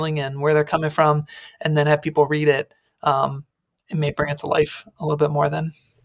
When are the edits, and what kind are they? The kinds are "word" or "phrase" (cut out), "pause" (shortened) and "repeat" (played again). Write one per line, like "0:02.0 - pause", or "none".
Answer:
none

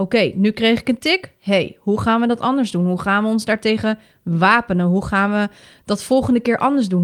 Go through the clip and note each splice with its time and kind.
none

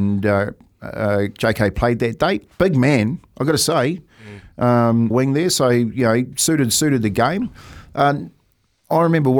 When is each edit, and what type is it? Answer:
0:05.1 - phrase

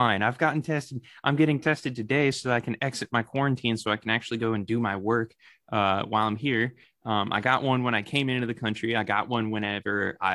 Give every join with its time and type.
none

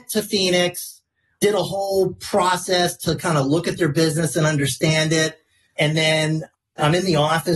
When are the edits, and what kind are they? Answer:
none

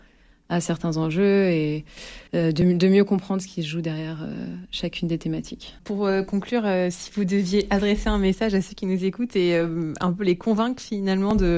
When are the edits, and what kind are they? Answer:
0:02.3 - pause
0:05.8 - pause

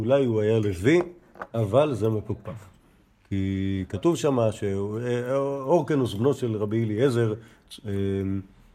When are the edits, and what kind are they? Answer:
none

